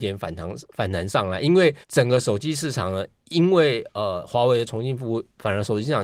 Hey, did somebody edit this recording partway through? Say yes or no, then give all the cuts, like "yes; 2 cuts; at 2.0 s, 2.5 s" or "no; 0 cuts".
yes; 1 cut; at 1.8 s